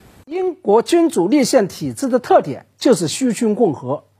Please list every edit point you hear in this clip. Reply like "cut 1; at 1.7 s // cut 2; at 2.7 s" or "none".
none